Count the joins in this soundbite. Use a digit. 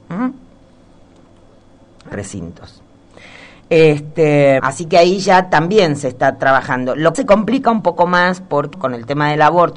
4